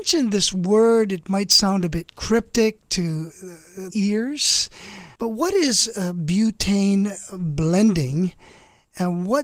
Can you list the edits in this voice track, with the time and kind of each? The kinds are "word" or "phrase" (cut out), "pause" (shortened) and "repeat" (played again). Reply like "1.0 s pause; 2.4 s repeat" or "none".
3.9 s phrase; 5.1 s pause